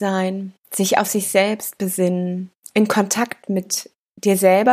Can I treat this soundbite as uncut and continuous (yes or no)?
no